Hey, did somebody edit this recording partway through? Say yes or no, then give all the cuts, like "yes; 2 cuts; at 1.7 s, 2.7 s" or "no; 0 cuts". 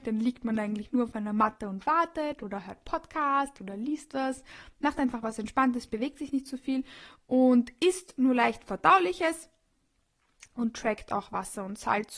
no; 0 cuts